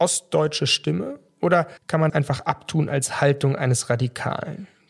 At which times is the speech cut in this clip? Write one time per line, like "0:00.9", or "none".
0:01.8
0:02.1